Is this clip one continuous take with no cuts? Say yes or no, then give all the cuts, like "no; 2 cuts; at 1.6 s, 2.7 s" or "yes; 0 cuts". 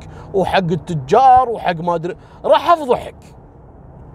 yes; 0 cuts